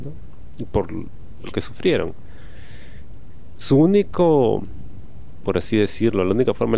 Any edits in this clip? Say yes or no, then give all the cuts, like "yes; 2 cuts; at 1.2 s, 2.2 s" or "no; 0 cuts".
yes; 2 cuts; at 1.5 s, 5.4 s